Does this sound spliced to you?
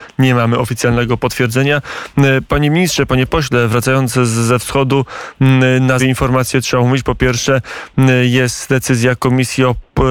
yes; 1 cut; at 6.0 s

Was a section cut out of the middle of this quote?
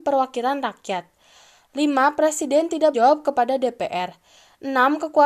yes; 1 cut; at 2.9 s

